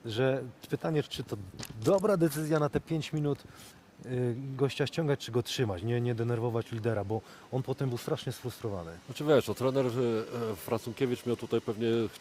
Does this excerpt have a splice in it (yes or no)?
yes